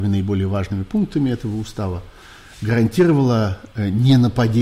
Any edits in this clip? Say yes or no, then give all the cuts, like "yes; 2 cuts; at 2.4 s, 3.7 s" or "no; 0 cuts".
no; 0 cuts